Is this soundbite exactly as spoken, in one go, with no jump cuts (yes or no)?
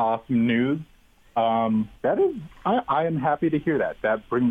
no